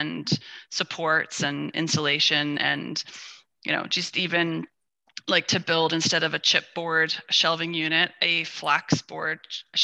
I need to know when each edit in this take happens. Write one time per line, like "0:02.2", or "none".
none